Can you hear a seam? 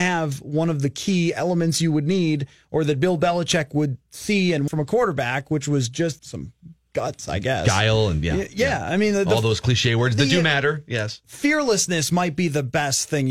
yes; 2 cuts; at 4.7 s, 6.2 s

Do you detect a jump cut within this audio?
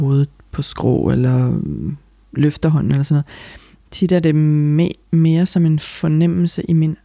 no; 0 cuts

